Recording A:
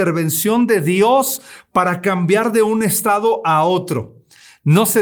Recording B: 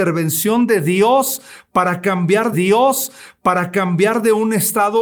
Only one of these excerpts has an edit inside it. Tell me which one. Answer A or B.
B